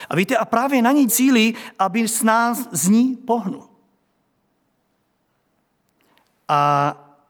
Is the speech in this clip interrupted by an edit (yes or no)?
yes